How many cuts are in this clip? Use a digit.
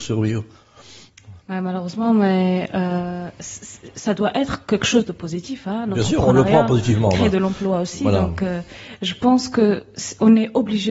1